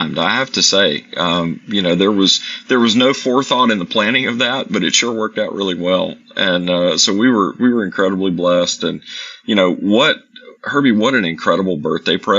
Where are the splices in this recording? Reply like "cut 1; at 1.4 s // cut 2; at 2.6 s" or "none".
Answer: cut 1; at 10.6 s